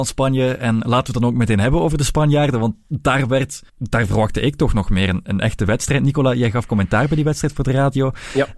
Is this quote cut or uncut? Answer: cut